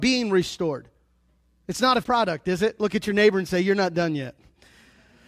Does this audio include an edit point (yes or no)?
yes